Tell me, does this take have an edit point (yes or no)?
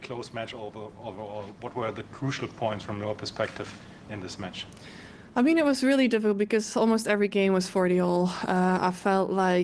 yes